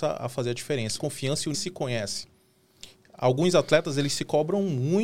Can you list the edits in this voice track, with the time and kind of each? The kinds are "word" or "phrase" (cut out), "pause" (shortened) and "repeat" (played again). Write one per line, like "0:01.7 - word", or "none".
0:01.0 - phrase
0:01.5 - phrase